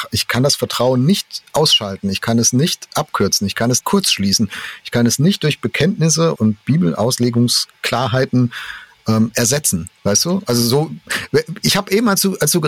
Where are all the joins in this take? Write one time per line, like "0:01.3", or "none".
0:03.8
0:06.4
0:10.0